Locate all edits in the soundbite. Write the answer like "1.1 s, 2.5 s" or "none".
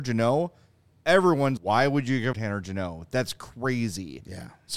1.6 s, 2.3 s